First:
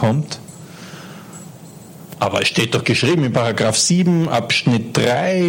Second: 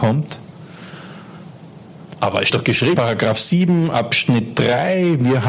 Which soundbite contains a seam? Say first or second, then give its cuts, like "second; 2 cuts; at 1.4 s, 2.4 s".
second; 2 cuts; at 2.5 s, 2.9 s